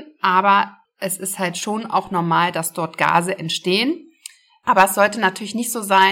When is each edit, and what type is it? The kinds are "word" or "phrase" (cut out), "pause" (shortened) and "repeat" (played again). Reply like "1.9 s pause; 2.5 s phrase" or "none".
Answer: none